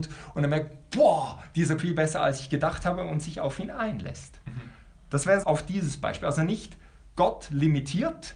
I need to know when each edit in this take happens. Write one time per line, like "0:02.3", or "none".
0:01.8
0:05.4